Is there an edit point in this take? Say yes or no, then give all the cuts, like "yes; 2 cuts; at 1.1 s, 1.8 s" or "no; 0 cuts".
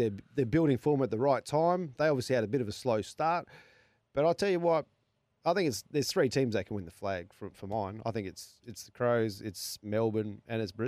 no; 0 cuts